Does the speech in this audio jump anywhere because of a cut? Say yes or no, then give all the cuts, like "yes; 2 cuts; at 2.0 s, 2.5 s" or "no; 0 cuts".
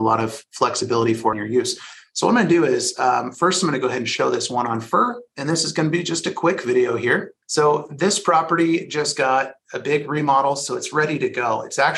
yes; 2 cuts; at 1.3 s, 7.4 s